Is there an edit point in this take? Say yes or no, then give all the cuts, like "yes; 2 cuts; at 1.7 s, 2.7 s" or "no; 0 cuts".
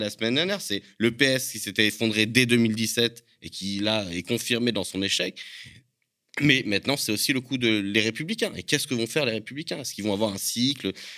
no; 0 cuts